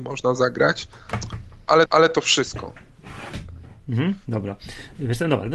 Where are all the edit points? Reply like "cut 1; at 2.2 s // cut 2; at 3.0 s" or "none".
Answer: cut 1; at 1.9 s